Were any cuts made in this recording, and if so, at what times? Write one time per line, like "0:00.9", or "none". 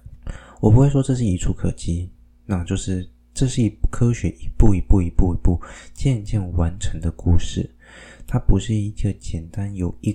none